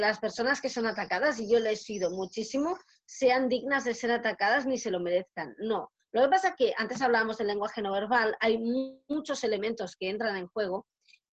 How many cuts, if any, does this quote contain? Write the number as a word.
zero